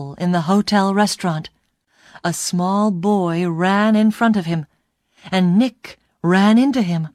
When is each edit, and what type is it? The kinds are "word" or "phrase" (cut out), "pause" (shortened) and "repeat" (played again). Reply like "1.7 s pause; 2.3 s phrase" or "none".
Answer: none

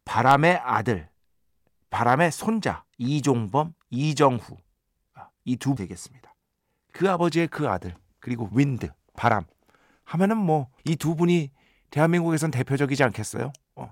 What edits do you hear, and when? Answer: 2.9 s pause; 5.8 s word; 10.8 s pause

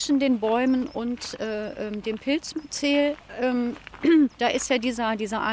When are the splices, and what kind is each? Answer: 4.3 s pause

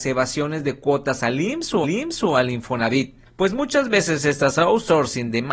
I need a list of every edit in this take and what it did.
1.8 s repeat; 3.3 s pause

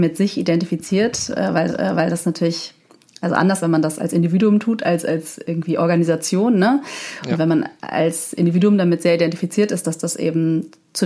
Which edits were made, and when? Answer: 1.7 s repeat; 3.6 s word

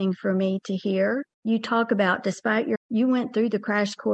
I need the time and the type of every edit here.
1.3 s pause; 2.7 s phrase

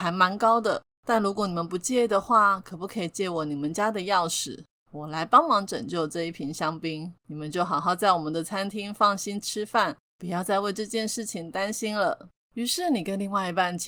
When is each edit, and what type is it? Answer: 7.2 s pause

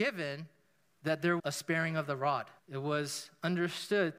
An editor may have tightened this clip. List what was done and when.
1.4 s word; 2.6 s pause

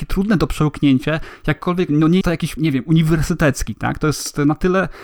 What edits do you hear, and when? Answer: 1.9 s word; 2.2 s word; 2.6 s word

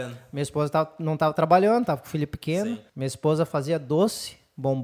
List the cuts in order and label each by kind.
2.9 s pause

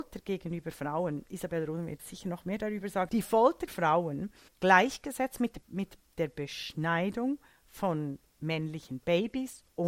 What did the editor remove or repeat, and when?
1.3 s word; 2.0 s word; 3.1 s word; 3.7 s word; 4.5 s word; 5.6 s word; 8.4 s word

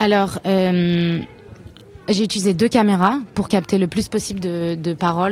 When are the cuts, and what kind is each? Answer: none

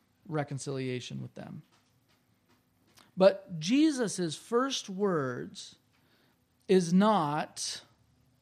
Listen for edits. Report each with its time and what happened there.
none

